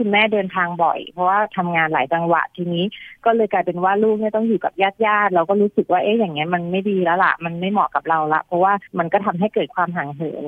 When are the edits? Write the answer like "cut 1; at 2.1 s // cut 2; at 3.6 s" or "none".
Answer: cut 1; at 8.9 s